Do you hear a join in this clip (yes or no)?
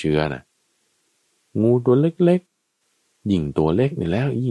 no